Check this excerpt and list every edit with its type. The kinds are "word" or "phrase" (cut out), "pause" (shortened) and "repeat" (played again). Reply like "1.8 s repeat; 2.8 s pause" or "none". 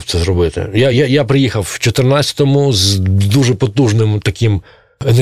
none